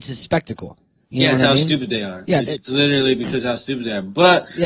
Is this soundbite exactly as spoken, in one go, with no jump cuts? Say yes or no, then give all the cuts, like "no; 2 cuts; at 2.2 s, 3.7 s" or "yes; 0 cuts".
no; 1 cut; at 2.5 s